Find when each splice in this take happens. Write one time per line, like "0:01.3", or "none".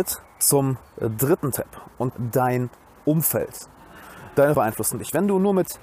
0:02.1
0:04.5